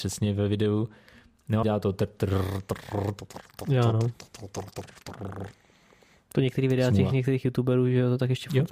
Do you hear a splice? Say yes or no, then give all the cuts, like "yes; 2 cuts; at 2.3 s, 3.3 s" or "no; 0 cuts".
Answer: yes; 1 cut; at 1.6 s